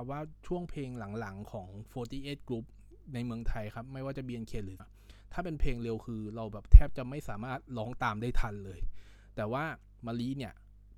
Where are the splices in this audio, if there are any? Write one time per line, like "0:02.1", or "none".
0:04.8